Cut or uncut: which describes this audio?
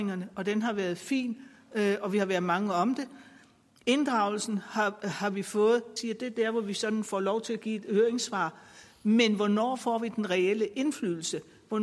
cut